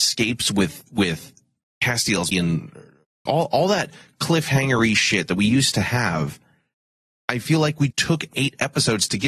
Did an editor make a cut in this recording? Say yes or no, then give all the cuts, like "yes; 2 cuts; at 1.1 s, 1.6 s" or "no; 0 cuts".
yes; 3 cuts; at 2.3 s, 3.3 s, 7.9 s